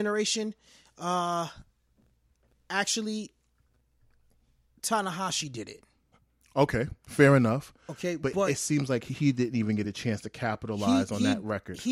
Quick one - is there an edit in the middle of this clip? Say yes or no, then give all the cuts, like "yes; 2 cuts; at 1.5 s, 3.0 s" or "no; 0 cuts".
no; 0 cuts